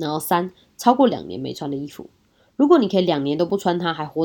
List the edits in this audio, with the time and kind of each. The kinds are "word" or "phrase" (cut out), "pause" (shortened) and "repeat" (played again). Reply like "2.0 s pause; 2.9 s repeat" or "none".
none